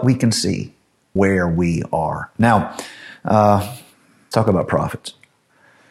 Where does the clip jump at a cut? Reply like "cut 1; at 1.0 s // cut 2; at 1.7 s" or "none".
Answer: cut 1; at 1.2 s // cut 2; at 4.3 s